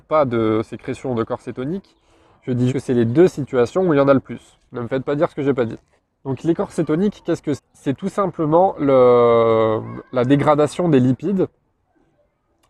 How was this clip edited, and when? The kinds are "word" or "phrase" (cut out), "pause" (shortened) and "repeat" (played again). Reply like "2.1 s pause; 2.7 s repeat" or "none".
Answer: 2.7 s word; 6.0 s pause; 7.6 s word